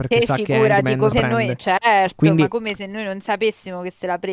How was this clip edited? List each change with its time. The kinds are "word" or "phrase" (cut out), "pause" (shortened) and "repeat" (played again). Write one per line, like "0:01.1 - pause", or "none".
0:01.1 - word